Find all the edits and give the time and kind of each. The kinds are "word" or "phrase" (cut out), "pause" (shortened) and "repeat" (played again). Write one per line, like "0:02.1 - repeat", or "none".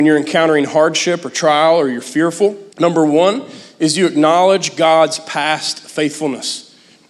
0:02.7 - pause